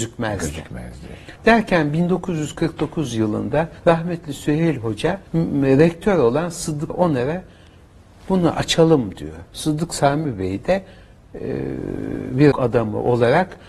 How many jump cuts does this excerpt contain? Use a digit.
6